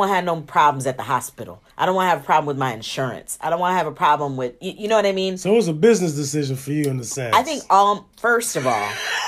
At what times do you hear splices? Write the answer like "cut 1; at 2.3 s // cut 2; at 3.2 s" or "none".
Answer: cut 1; at 1.7 s // cut 2; at 8.1 s

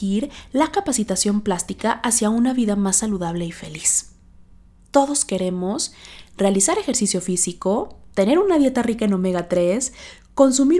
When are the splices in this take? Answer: none

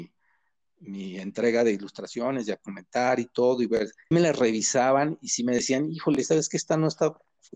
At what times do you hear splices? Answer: cut 1; at 4.1 s

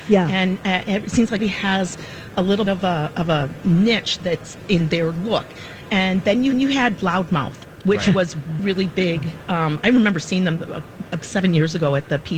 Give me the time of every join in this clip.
cut 1; at 1.4 s // cut 2; at 2.7 s // cut 3; at 6.5 s // cut 4; at 8.6 s // cut 5; at 11.2 s

